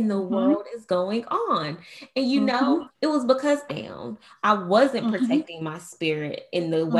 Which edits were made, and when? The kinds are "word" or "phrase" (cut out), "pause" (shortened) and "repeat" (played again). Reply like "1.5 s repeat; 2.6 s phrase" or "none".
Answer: 2.9 s pause; 3.7 s phrase